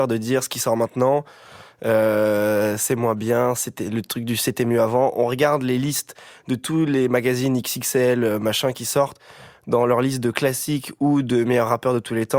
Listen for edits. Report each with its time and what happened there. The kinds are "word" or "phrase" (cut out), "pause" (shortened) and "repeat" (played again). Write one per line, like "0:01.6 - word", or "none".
none